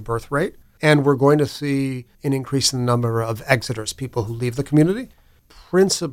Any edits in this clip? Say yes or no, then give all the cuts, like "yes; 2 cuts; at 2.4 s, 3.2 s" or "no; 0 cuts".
yes; 1 cut; at 2.1 s